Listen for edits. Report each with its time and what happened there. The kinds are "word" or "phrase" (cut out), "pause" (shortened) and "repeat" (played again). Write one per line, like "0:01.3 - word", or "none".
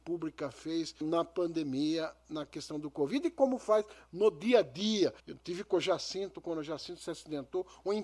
0:01.0 - word
0:05.2 - pause